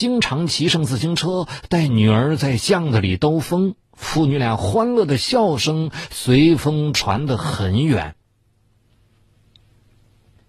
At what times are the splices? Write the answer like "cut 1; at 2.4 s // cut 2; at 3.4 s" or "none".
cut 1; at 3.8 s